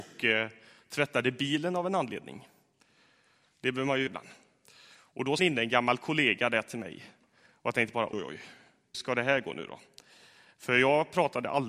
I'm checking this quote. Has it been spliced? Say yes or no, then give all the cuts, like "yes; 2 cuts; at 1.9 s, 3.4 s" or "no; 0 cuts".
yes; 4 cuts; at 4.1 s, 5.4 s, 8.1 s, 8.9 s